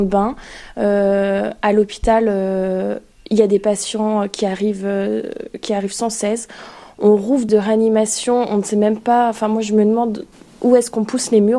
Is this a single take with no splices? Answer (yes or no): no